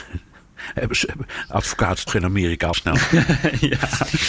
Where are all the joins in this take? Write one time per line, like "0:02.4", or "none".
0:02.1
0:02.7